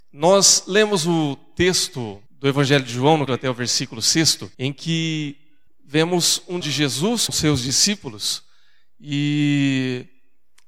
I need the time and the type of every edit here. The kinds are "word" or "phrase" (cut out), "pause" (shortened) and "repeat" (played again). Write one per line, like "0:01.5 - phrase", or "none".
0:02.3 - pause
0:03.3 - word
0:04.5 - pause
0:05.7 - pause
0:06.6 - word
0:07.3 - word